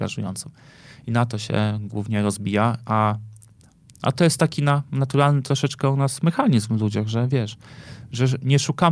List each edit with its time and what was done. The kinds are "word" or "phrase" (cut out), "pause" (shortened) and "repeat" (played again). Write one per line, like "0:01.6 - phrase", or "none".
none